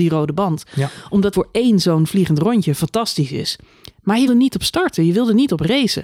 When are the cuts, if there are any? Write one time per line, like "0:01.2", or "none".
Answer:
0:01.3
0:04.3